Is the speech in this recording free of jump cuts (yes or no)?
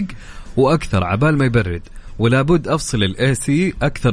yes